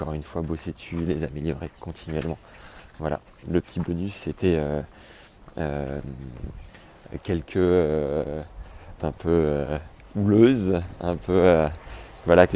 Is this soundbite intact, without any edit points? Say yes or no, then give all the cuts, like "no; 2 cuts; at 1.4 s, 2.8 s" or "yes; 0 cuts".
no; 1 cut; at 9.0 s